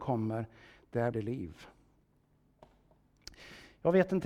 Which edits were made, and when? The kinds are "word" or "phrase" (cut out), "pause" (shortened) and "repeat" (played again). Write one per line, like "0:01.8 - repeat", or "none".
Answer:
0:01.1 - word